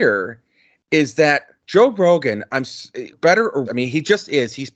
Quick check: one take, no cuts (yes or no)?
no